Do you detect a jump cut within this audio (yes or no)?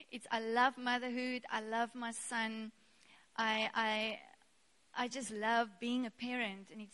no